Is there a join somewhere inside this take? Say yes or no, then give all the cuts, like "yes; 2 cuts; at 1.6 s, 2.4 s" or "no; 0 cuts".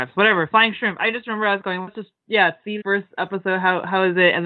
yes; 1 cut; at 2.8 s